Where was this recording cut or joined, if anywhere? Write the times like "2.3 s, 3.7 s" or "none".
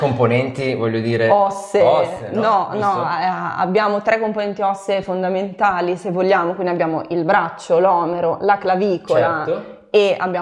none